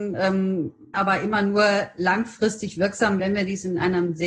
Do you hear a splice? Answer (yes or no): yes